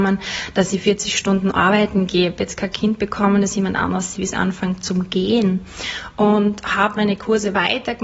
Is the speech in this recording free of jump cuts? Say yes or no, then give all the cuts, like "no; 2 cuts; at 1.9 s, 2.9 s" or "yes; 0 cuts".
no; 2 cuts; at 4.1 s, 7.0 s